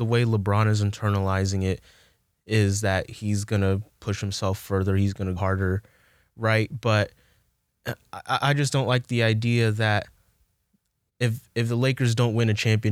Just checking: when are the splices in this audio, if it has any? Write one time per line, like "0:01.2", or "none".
0:05.4